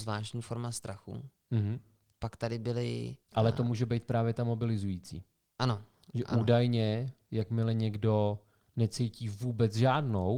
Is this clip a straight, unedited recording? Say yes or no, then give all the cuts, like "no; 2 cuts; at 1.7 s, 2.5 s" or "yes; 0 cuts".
no; 1 cut; at 3.2 s